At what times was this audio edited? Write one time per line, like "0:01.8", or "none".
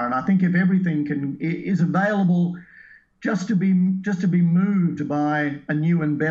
none